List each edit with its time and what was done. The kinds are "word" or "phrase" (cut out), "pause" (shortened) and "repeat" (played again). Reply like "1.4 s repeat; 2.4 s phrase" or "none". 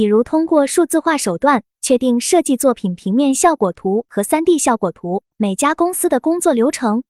5.3 s pause